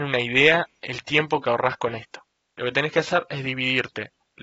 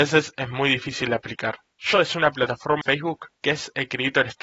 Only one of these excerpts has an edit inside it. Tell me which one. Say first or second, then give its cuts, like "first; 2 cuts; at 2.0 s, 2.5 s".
second; 3 cuts; at 1.9 s, 2.8 s, 3.4 s